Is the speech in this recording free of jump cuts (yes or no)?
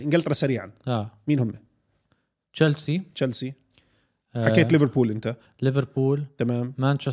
yes